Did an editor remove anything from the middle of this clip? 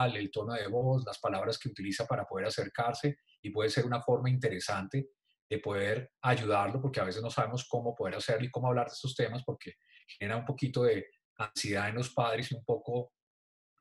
no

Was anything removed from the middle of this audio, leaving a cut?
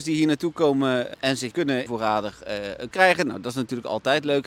yes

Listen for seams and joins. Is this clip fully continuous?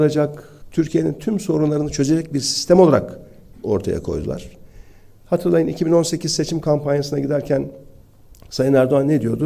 yes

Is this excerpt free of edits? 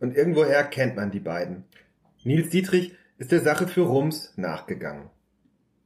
yes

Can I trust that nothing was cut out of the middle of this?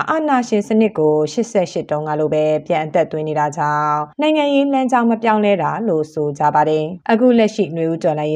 no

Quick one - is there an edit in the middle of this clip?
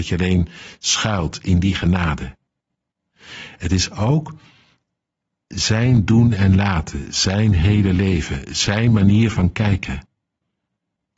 no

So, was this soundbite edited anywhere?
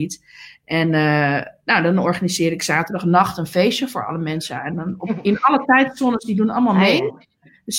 no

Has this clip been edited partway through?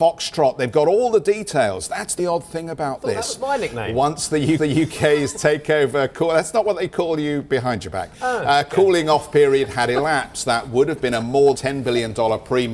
yes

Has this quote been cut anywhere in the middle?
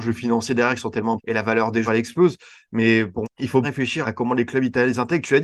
yes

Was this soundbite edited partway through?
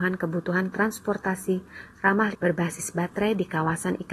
yes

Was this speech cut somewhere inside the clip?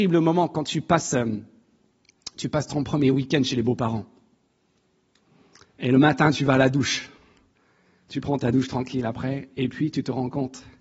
no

